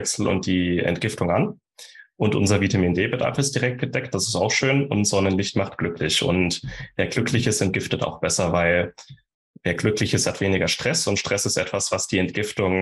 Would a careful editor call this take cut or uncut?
uncut